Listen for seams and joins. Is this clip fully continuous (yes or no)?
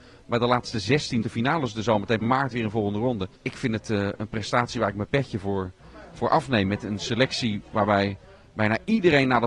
no